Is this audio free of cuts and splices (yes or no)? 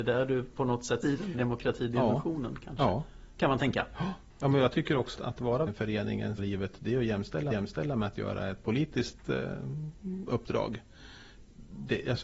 no